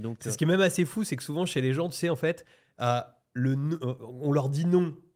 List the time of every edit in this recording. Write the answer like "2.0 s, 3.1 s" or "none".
none